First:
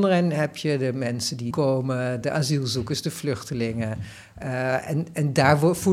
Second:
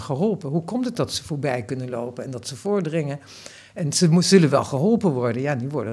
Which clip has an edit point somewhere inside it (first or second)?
first